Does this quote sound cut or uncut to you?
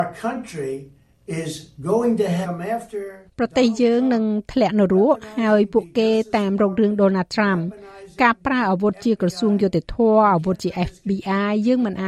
cut